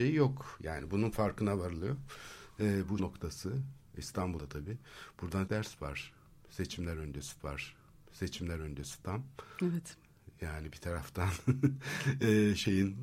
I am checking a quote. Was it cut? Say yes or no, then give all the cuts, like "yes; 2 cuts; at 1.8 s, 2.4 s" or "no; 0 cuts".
yes; 4 cuts; at 3.0 s, 4.4 s, 5.5 s, 7.4 s